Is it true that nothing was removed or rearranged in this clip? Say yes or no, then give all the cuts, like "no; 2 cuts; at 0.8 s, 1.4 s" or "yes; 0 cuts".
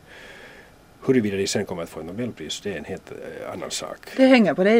yes; 0 cuts